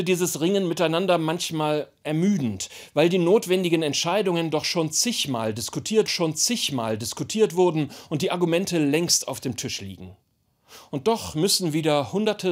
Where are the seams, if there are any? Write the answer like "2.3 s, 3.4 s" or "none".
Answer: 6.1 s